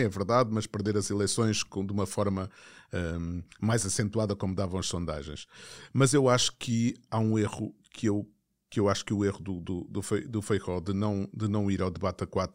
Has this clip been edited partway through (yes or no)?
no